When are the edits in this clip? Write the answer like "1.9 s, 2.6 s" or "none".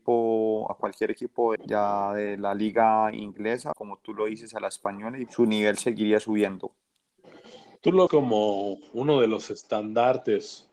1.6 s, 3.7 s, 5.3 s, 8.1 s